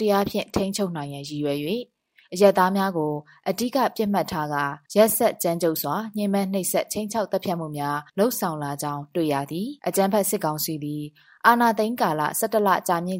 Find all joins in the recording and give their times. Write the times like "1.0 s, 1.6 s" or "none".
4.9 s, 8.1 s, 9.8 s